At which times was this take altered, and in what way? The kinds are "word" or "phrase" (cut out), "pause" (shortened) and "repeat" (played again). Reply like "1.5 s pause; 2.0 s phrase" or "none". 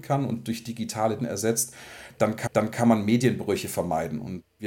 1.2 s word; 2.5 s repeat